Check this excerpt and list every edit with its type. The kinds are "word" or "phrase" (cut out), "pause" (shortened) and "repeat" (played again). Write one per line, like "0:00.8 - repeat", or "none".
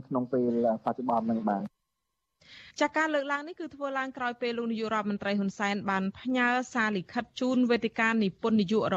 0:02.7 - pause